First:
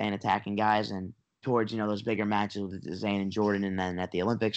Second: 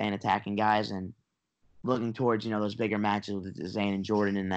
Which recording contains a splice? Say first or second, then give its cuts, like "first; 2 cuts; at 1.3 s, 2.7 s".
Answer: first; 1 cut; at 1.4 s